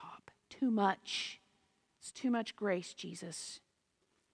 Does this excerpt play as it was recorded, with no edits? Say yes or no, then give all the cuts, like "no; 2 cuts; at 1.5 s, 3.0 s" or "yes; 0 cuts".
yes; 0 cuts